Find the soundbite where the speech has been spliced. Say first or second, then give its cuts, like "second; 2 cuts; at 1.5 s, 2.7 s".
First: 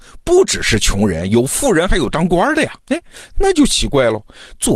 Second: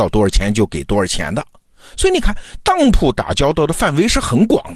first; 1 cut; at 2.8 s